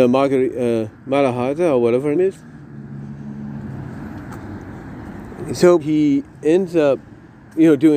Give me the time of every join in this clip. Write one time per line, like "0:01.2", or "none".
0:00.9
0:02.1
0:05.8